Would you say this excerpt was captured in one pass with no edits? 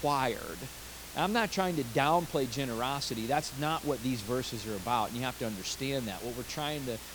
yes; 0 cuts

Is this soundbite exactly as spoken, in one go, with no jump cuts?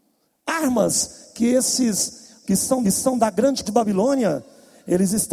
no; 3 cuts; at 2.4 s, 2.8 s, 3.6 s

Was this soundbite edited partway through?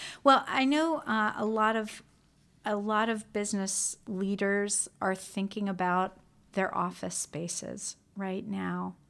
no; 0 cuts

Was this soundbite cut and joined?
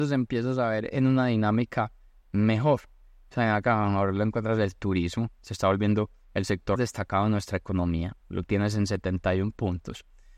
yes; 1 cut; at 6.8 s

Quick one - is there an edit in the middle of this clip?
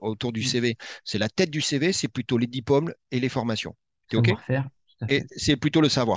no; 0 cuts

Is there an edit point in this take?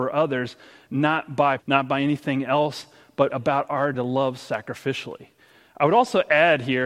yes; 3 cuts; at 1.6 s, 3.3 s, 3.9 s

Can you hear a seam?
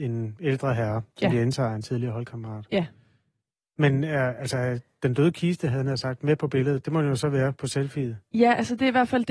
no; 0 cuts

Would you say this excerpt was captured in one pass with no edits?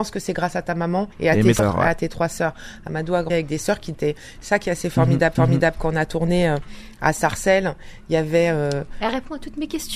no; 5 cuts; at 1.1 s, 1.6 s, 3.3 s, 3.9 s, 5.3 s

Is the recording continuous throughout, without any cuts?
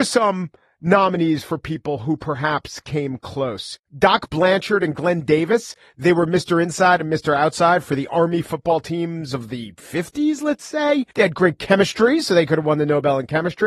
no; 2 cuts; at 3.9 s, 11.1 s

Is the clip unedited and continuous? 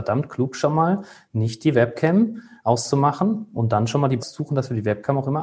no; 1 cut; at 4.2 s

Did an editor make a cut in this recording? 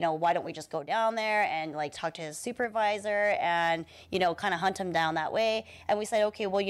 no; 0 cuts

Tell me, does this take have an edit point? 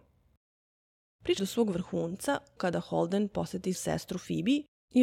yes; 3 cuts; at 1.4 s, 2.6 s, 3.7 s

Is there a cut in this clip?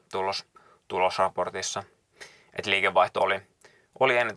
no; 0 cuts

